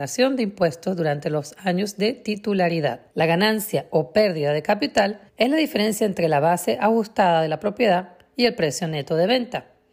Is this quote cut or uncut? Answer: cut